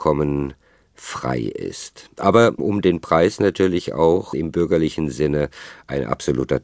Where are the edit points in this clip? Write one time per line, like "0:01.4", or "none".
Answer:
none